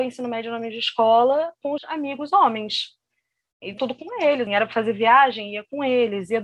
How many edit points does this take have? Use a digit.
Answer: 3